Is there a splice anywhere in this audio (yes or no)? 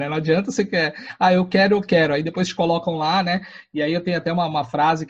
no